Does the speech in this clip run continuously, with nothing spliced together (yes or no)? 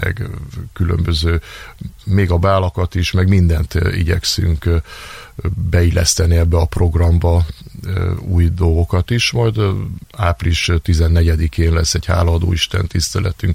yes